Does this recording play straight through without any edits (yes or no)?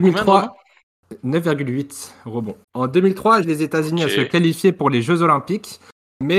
no